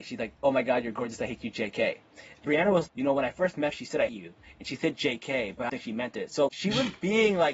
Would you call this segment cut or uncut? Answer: cut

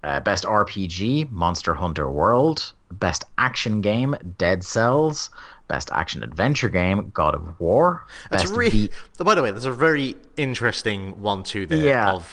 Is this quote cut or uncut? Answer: uncut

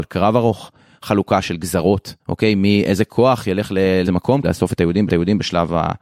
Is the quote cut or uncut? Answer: cut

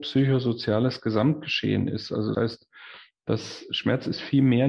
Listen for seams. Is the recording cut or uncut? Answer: cut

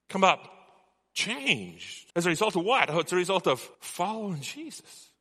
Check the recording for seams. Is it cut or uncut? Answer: cut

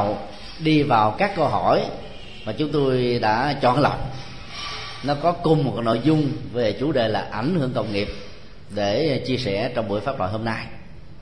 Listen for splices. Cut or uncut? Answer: uncut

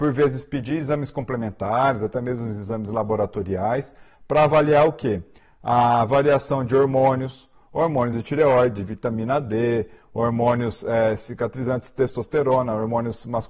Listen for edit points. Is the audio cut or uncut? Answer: uncut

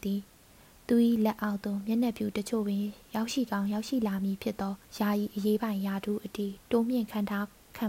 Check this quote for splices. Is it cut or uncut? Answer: cut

